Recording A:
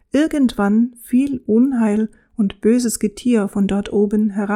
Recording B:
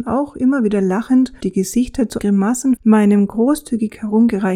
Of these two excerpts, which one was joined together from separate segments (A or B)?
B